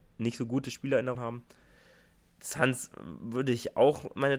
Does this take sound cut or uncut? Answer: cut